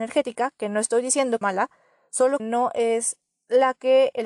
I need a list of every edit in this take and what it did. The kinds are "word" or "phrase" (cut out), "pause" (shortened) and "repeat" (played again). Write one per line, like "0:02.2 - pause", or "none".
0:01.4 - word
0:02.4 - word